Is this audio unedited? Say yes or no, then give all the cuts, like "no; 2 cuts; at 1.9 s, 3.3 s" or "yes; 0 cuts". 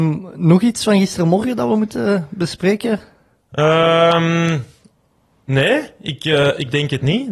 yes; 0 cuts